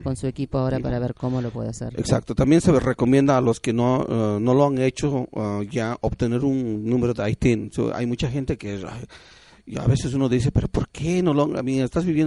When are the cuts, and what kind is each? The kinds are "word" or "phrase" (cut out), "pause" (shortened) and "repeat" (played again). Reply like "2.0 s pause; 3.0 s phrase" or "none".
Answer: none